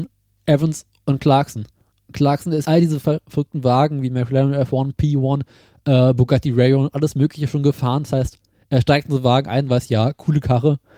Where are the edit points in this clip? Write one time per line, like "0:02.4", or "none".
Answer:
0:02.6